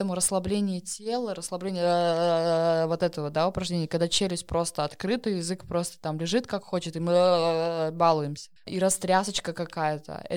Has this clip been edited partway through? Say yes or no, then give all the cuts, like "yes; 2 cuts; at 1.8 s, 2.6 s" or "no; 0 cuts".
yes; 1 cut; at 8.6 s